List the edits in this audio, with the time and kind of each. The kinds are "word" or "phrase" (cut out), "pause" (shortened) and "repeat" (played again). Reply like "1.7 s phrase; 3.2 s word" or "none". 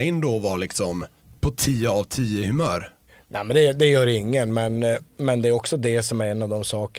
none